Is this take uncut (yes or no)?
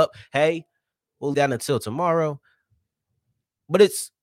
no